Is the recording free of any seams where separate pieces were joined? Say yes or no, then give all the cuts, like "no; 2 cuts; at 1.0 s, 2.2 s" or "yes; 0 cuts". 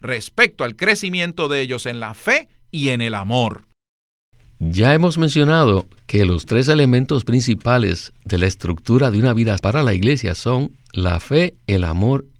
no; 1 cut; at 9.6 s